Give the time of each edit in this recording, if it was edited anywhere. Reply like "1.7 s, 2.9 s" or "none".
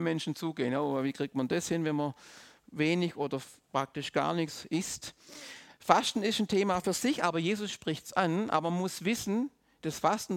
none